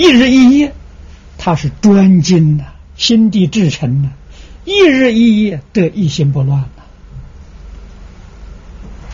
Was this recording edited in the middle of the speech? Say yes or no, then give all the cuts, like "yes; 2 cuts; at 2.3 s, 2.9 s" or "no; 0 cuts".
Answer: yes; 1 cut; at 2.8 s